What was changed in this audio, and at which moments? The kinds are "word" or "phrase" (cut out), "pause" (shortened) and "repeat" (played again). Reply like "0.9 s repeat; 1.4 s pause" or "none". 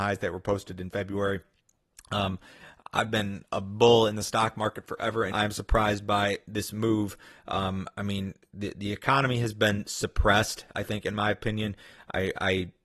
5.3 s word